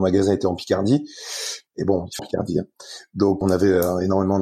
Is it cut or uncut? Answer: cut